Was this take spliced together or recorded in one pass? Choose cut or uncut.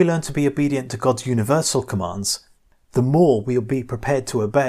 uncut